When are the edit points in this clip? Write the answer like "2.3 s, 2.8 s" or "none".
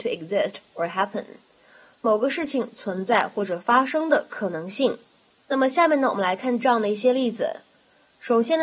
none